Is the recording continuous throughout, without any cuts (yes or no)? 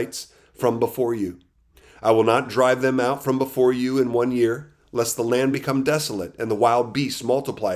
yes